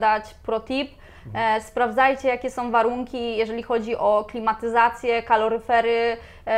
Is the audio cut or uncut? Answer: uncut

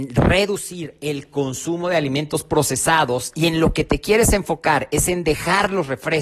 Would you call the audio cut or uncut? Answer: uncut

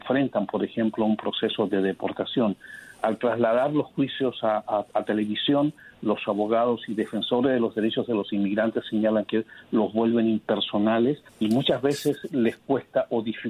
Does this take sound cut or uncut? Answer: cut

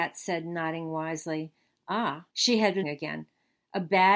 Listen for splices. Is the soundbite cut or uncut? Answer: cut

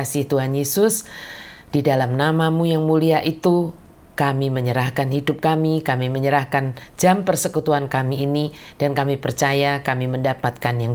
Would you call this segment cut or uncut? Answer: uncut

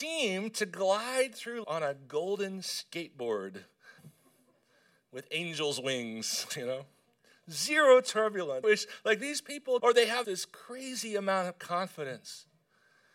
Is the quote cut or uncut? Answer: cut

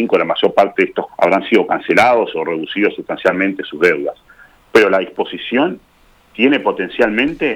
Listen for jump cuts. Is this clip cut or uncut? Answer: cut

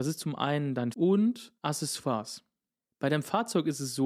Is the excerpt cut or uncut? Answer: cut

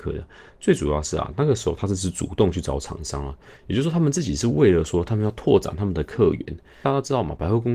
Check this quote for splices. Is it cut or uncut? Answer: uncut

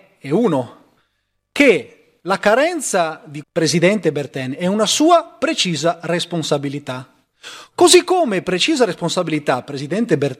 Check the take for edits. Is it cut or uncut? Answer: cut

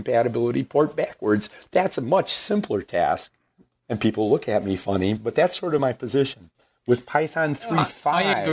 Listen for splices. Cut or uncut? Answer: uncut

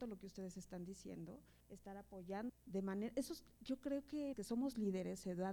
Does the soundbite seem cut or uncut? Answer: cut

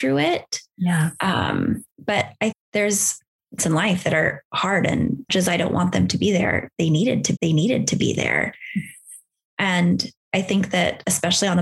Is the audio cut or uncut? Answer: cut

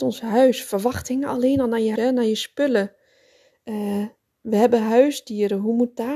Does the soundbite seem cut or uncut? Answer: cut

